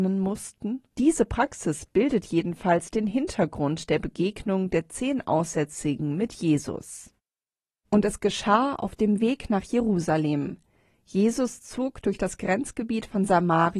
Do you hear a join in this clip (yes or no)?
no